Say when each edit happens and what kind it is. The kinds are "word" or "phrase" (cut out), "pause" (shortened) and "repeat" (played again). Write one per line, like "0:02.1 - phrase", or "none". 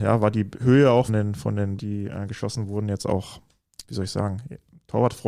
0:01.1 - word
0:01.8 - word
0:03.8 - word